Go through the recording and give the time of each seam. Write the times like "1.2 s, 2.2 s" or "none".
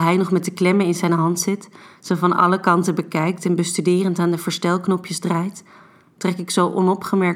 none